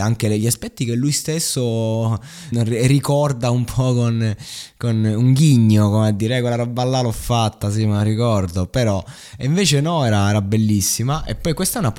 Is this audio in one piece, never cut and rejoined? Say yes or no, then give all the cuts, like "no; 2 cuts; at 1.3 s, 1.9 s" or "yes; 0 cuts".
no; 1 cut; at 2.5 s